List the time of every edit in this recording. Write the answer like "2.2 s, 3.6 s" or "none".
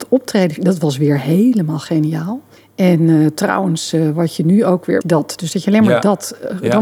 2.6 s, 5.0 s